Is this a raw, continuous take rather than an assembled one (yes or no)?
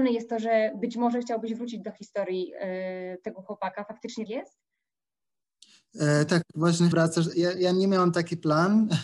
no